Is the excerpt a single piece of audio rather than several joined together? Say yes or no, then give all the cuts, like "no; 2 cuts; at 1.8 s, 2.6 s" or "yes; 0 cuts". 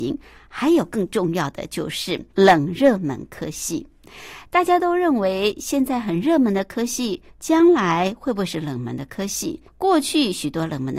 no; 3 cuts; at 2.3 s, 7.3 s, 9.7 s